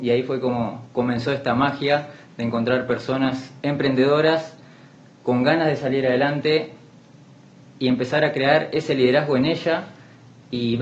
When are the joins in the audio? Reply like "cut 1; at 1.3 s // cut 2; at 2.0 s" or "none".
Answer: cut 1; at 3.6 s